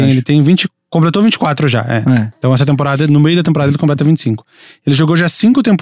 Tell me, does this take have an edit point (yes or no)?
no